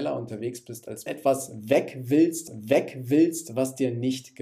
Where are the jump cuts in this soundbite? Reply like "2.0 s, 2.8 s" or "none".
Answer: 1.1 s, 2.5 s